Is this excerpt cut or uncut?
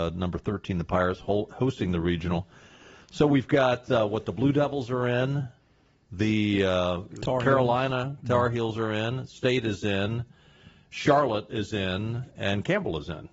uncut